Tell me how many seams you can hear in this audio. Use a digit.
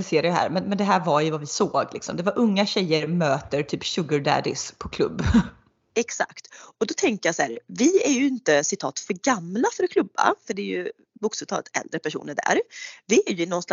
0